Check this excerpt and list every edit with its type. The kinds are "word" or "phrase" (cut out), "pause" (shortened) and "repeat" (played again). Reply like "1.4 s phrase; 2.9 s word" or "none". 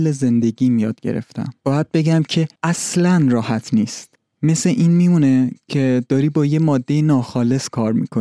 1.6 s pause; 2.6 s pause; 4.2 s pause